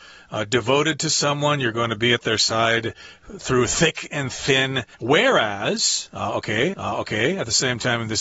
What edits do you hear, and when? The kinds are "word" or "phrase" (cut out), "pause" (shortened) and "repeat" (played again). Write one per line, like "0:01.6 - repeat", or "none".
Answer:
0:04.9 - pause
0:06.7 - repeat